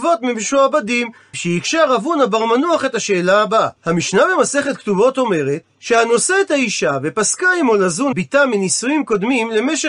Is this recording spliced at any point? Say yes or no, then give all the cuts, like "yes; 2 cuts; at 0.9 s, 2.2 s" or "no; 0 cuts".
yes; 4 cuts; at 1.3 s, 3.8 s, 5.7 s, 8.1 s